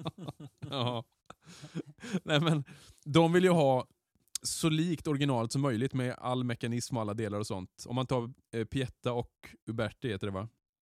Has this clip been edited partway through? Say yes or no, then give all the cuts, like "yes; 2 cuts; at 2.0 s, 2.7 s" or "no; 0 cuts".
yes; 2 cuts; at 4.4 s, 9.6 s